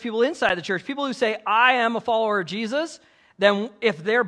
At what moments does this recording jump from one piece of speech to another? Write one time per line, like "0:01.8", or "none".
none